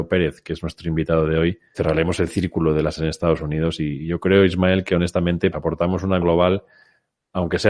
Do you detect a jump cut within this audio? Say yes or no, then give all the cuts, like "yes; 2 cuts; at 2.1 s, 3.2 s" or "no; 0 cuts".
yes; 4 cuts; at 1.7 s, 3.0 s, 5.5 s, 6.2 s